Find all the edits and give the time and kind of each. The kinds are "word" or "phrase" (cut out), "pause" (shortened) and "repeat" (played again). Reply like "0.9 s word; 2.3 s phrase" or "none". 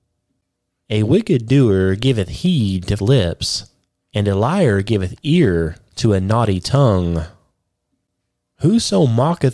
3.0 s word

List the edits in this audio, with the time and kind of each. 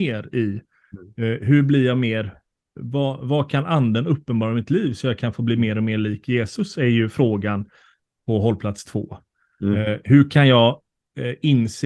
none

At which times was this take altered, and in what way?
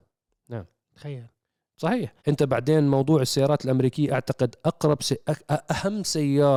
2.2 s pause

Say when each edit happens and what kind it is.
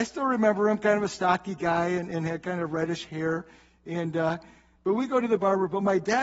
none

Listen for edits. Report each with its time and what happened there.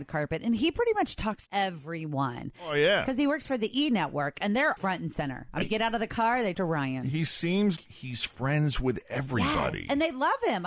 1.5 s word; 4.8 s word; 5.6 s word; 6.5 s word; 7.8 s word

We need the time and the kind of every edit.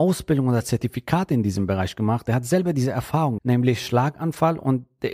3.4 s word

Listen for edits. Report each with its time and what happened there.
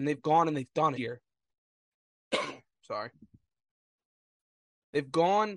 1.0 s phrase

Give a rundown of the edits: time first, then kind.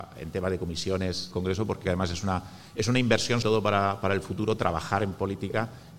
1.3 s word; 1.8 s word; 3.4 s word

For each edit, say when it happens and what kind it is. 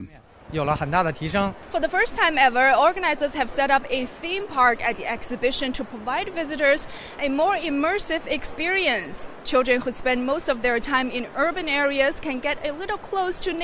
none

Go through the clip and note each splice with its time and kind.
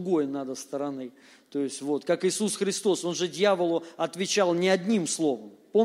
none

